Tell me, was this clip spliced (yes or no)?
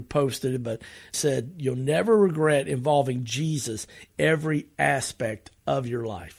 yes